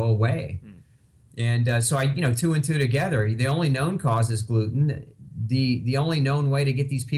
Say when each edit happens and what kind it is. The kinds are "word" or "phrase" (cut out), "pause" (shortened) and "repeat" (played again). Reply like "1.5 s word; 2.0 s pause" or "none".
none